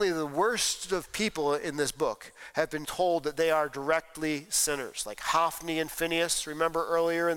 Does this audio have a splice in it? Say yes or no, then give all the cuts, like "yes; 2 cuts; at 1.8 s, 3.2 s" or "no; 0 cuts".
yes; 1 cut; at 2.8 s